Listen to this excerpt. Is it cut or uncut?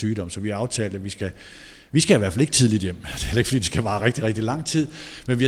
uncut